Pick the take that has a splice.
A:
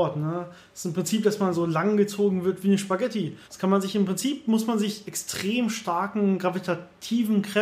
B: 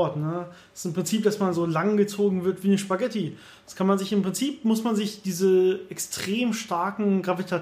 A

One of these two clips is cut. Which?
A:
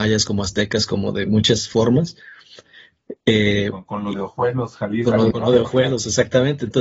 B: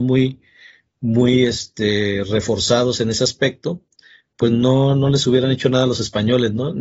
A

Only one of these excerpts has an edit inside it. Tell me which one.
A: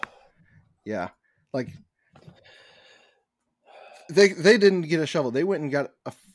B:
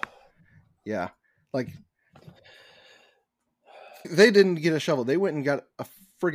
B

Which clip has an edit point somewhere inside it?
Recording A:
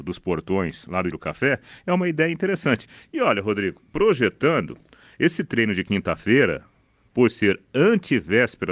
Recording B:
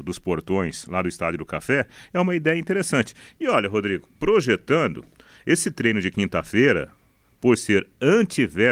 A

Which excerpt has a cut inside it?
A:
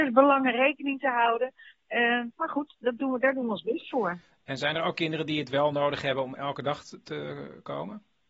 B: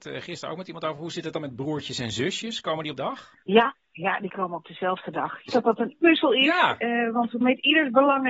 B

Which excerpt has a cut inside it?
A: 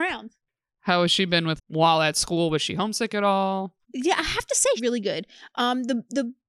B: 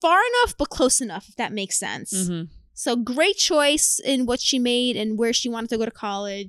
A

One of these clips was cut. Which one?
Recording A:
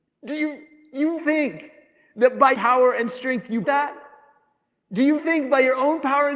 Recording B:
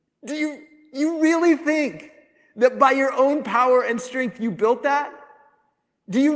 A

